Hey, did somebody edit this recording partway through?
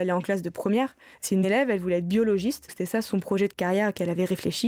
yes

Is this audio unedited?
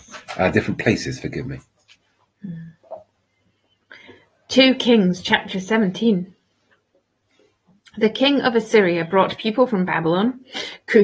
yes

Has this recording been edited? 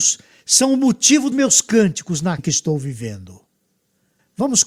yes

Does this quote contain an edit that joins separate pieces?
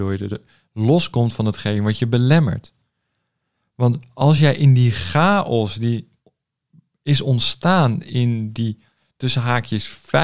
no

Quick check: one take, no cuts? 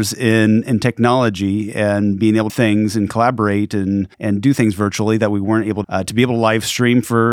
no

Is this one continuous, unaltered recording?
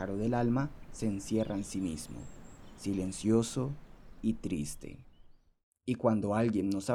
yes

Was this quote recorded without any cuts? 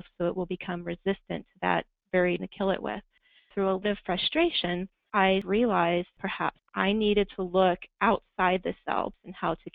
no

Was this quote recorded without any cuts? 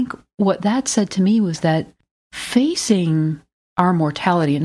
yes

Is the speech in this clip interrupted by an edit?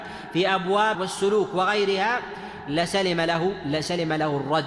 yes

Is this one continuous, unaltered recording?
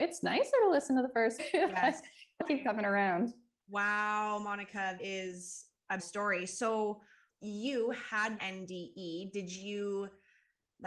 no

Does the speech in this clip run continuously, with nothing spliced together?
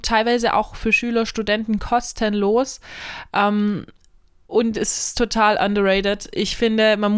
yes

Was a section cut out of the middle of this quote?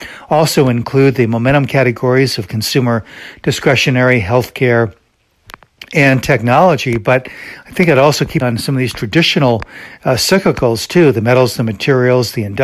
yes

